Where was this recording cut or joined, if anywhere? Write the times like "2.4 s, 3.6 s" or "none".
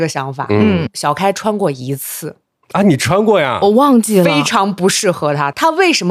none